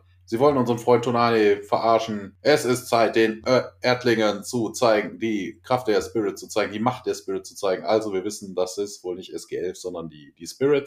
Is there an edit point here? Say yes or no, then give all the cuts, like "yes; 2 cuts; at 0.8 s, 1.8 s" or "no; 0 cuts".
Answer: no; 0 cuts